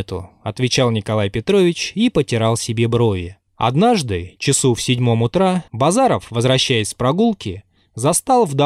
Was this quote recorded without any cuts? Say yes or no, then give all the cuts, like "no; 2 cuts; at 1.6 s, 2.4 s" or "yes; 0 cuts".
no; 2 cuts; at 3.5 s, 5.7 s